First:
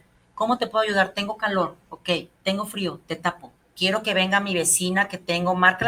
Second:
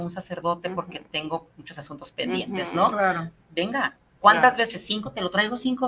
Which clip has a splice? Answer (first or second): first